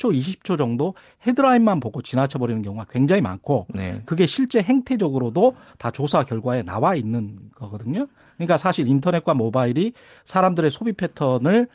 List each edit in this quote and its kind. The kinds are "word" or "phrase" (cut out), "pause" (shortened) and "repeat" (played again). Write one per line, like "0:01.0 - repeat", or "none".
none